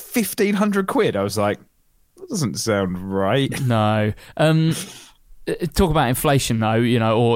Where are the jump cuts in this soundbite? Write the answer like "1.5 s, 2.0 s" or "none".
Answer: none